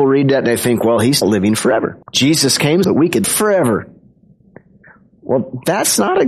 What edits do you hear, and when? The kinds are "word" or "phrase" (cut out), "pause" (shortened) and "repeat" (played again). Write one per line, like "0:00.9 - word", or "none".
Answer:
0:01.2 - phrase
0:02.0 - pause
0:02.8 - word
0:03.2 - word